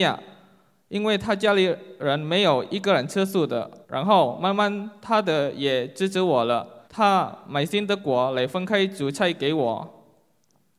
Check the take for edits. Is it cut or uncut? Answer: cut